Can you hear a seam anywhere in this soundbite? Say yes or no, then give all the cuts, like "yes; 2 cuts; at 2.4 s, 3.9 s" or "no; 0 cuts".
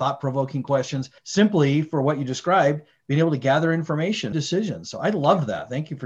yes; 2 cuts; at 1.2 s, 4.3 s